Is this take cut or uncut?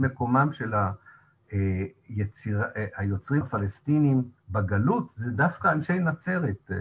cut